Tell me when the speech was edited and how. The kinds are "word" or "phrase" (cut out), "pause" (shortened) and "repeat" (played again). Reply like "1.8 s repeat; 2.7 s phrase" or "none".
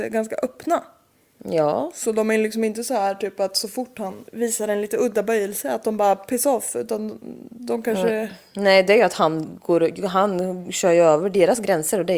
4.3 s pause